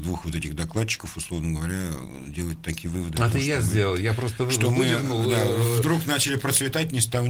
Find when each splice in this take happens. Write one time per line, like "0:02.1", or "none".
none